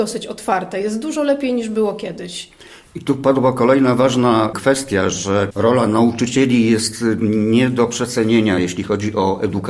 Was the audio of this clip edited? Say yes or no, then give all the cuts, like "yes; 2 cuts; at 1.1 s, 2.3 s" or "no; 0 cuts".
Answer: no; 0 cuts